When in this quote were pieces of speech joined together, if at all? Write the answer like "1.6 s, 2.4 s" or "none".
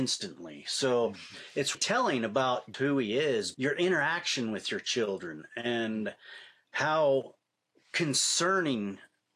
1.7 s, 2.7 s, 3.5 s